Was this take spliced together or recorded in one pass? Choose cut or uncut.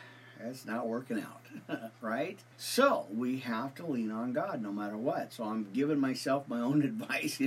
cut